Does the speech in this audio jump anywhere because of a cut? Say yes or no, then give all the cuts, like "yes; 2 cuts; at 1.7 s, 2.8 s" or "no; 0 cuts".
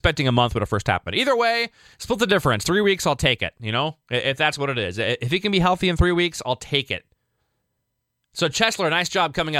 no; 0 cuts